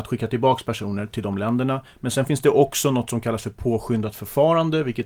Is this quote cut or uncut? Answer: uncut